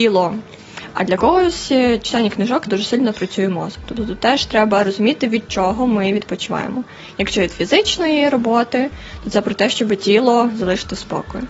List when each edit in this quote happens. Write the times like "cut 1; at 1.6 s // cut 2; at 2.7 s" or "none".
cut 1; at 2.7 s